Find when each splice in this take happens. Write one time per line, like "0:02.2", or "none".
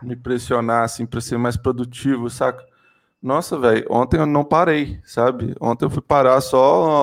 none